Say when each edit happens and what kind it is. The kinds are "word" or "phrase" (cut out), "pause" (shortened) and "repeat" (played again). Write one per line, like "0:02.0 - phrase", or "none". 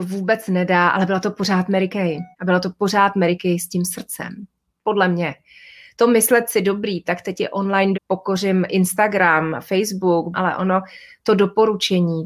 0:02.3 - pause
0:07.9 - word
0:10.3 - phrase